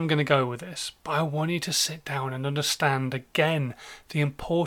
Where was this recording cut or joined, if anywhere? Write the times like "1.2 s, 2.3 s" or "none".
none